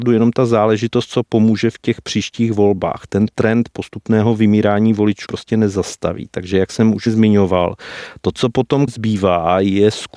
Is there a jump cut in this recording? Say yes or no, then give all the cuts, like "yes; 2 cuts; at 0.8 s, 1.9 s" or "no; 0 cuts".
yes; 2 cuts; at 5.3 s, 8.9 s